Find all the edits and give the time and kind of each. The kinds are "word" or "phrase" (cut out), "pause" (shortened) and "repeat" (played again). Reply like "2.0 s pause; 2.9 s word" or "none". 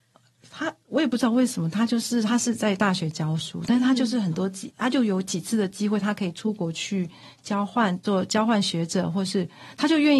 4.7 s word